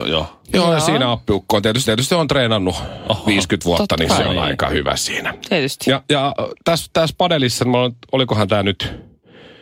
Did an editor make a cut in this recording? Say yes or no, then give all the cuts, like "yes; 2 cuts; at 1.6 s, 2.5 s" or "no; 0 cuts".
yes; 1 cut; at 1.9 s